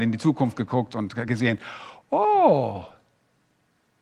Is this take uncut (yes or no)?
yes